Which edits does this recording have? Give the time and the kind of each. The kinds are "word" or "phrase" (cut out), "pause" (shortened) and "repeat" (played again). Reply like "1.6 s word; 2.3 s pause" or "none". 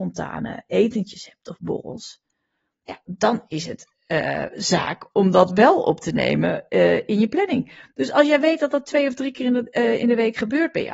none